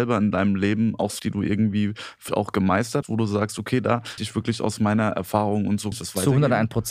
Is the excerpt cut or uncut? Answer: cut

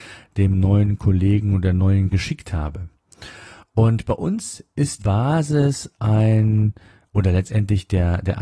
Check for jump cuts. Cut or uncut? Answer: cut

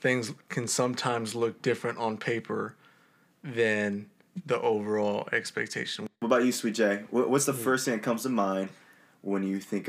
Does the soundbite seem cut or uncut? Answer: cut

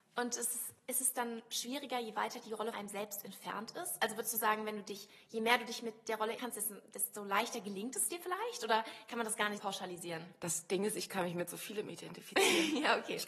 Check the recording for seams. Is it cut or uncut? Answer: cut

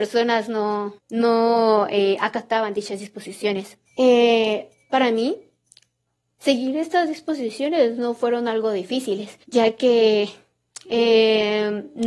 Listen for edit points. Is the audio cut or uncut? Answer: cut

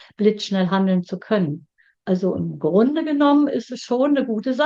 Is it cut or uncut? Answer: uncut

